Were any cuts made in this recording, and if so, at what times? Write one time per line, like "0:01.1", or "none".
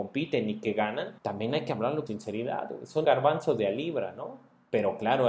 0:01.2
0:02.1
0:03.0